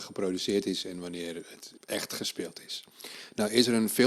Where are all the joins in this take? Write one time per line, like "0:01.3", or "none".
0:01.8